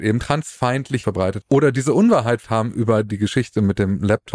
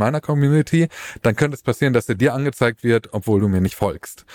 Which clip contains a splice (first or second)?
first